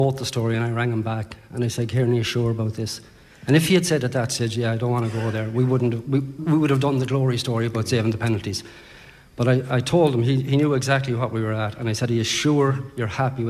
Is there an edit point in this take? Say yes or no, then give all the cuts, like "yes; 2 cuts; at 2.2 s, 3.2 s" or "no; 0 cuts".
yes; 2 cuts; at 6.4 s, 9.7 s